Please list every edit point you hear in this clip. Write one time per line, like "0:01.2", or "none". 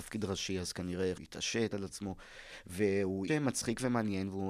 0:01.2
0:01.7
0:03.3